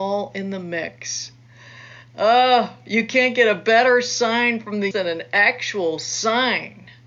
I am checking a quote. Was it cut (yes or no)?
yes